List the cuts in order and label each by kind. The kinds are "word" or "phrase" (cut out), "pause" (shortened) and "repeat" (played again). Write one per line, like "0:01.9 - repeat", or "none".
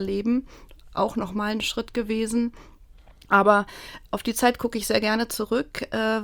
none